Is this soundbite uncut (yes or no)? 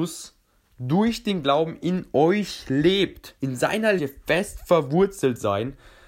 no